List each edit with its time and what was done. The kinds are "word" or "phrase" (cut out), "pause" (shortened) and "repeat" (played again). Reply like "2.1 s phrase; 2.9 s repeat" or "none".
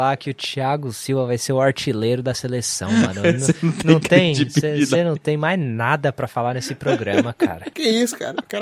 none

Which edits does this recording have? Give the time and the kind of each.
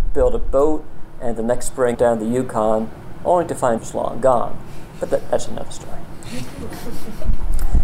1.9 s word; 3.8 s phrase

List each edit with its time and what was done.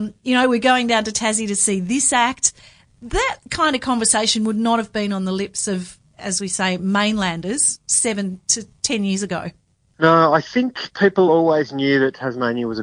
none

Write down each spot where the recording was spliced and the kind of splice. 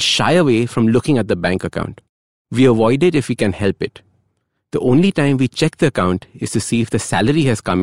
none

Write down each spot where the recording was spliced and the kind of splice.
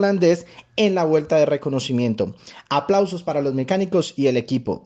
none

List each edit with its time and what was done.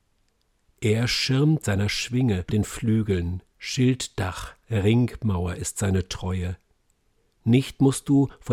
1.6 s phrase; 2.5 s phrase; 3.5 s pause

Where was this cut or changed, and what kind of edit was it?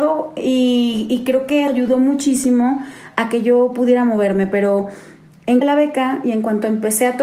1.7 s word; 5.6 s phrase

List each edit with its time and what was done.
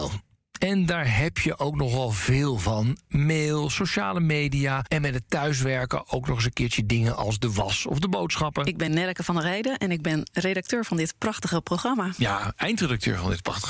none

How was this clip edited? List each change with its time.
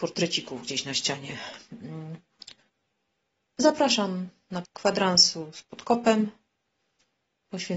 4.6 s phrase

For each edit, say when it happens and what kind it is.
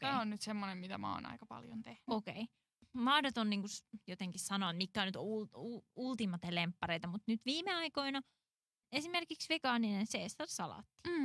none

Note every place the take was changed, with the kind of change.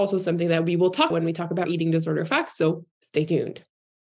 1.1 s word; 1.6 s word; 2.9 s pause

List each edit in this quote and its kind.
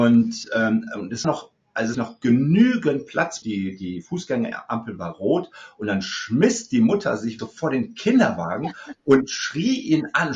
1.2 s word; 1.9 s phrase; 3.4 s phrase; 7.4 s word

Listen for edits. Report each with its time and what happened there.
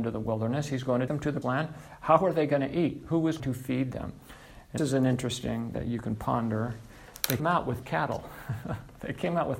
1.1 s word; 1.4 s word; 3.4 s word; 4.8 s word; 5.7 s word; 7.4 s word; 7.8 s word

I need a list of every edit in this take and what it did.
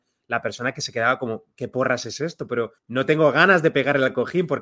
1.5 s pause; 2.8 s pause

